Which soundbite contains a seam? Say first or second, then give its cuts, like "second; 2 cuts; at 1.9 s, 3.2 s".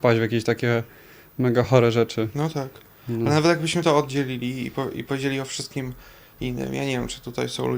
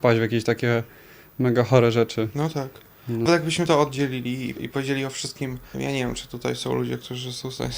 second; 3 cuts; at 3.3 s, 4.6 s, 5.7 s